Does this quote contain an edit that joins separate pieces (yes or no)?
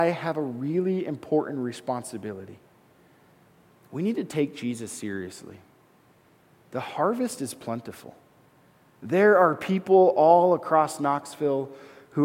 no